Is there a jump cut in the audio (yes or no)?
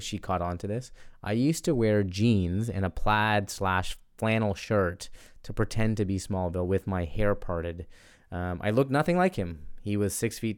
no